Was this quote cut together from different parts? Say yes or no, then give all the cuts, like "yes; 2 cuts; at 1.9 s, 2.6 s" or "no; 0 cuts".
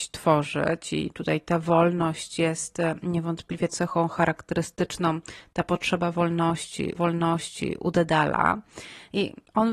yes; 2 cuts; at 3.7 s, 7.0 s